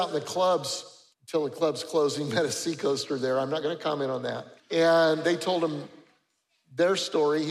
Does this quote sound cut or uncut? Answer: cut